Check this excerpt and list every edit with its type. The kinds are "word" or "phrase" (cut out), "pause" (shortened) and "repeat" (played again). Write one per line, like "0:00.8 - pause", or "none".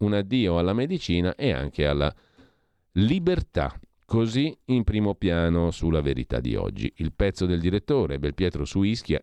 none